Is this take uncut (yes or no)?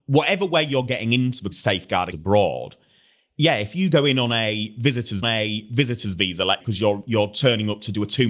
no